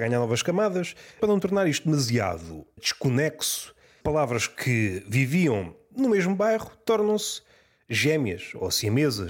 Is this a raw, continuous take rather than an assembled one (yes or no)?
yes